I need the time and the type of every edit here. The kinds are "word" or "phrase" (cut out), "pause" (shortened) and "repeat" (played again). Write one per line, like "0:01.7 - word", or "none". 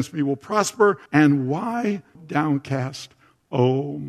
0:01.1 - pause
0:02.1 - word